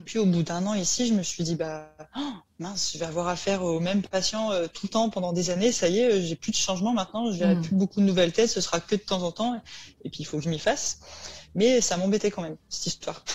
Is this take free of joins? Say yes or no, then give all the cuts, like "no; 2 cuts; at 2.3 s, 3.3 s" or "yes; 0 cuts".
yes; 0 cuts